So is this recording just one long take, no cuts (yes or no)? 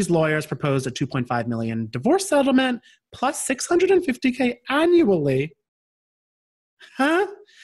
yes